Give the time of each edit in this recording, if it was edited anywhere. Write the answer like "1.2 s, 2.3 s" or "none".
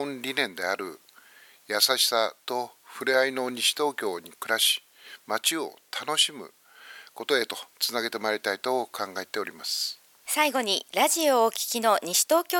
2.4 s, 7.7 s